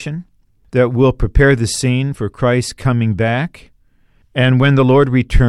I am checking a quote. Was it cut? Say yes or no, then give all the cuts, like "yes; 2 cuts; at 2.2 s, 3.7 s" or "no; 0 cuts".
no; 0 cuts